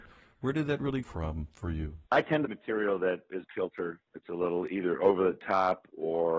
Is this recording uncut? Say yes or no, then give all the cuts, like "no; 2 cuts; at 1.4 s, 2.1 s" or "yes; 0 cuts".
no; 5 cuts; at 1.0 s, 2.1 s, 2.4 s, 3.4 s, 4.1 s